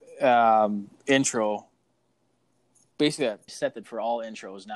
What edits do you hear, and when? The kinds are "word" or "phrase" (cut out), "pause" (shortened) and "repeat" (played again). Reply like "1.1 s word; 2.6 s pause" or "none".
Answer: 3.5 s word; 3.8 s word